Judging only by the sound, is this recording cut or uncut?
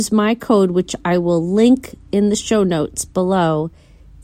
uncut